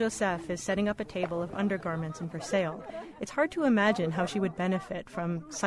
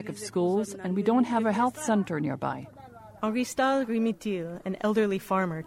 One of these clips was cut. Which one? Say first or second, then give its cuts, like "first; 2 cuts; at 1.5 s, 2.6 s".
first; 1 cut; at 2.3 s